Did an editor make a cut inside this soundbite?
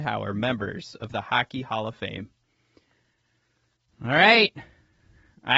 no; 0 cuts

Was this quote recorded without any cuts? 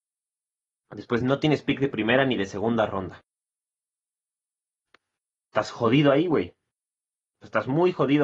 yes; 0 cuts

